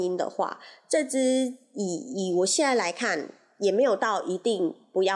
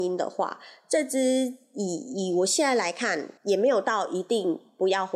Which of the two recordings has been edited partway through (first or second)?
second